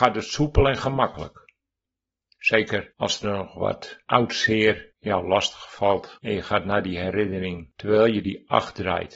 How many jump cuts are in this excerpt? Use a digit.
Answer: 0